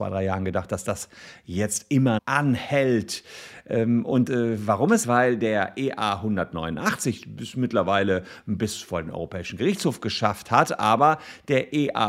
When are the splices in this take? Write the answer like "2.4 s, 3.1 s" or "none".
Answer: 2.2 s, 4.3 s, 5.0 s